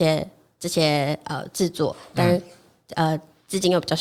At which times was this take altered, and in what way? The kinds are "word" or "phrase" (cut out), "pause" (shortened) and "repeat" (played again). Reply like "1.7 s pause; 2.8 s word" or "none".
none